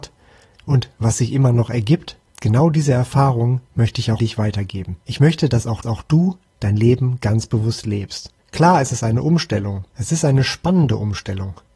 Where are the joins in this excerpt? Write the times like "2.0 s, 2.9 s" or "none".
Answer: 2.3 s, 4.2 s, 5.0 s, 5.8 s, 8.4 s, 9.9 s